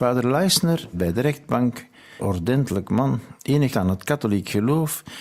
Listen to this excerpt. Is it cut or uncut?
cut